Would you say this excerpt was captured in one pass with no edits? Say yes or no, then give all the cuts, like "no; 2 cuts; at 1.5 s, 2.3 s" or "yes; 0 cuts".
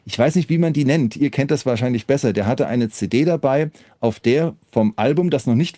yes; 0 cuts